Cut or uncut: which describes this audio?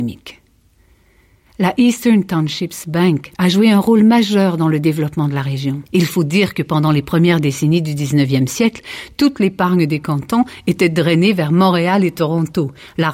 cut